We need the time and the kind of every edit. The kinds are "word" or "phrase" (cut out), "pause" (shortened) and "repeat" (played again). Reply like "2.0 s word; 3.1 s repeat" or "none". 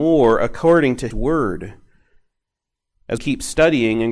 1.1 s word; 3.2 s word